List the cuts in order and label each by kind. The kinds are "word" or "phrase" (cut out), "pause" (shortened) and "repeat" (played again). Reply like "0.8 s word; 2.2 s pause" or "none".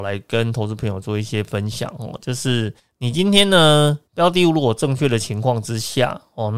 2.8 s pause; 4.1 s pause